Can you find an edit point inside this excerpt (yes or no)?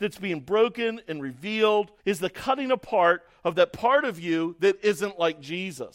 yes